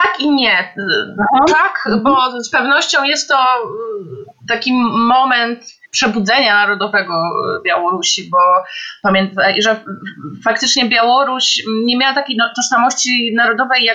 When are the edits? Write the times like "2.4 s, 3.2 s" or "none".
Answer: 5.8 s